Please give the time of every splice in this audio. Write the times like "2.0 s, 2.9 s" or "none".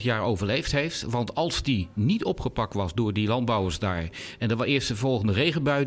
none